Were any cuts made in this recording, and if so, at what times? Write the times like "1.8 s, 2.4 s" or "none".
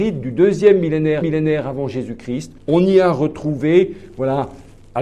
1.2 s, 2.6 s